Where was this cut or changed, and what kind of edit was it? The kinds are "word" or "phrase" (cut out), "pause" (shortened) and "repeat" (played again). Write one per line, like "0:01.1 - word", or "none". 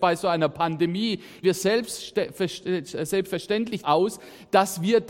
0:01.4 - word
0:03.8 - word